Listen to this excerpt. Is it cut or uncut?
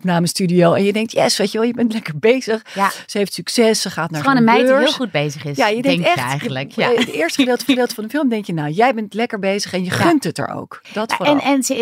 cut